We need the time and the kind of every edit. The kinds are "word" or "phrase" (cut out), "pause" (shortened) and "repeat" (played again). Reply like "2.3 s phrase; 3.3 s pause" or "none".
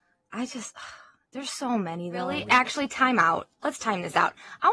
none